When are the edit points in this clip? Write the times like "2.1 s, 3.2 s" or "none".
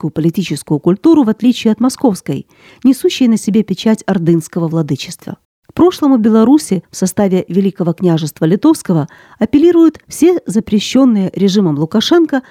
5.4 s, 6.8 s, 10.0 s